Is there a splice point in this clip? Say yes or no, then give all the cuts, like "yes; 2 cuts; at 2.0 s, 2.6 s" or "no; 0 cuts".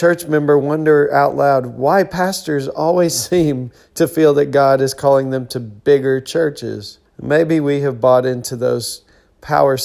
yes; 1 cut; at 7.0 s